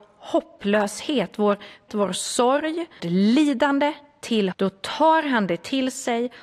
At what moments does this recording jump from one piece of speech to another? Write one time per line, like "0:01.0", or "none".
0:01.9
0:03.0
0:04.5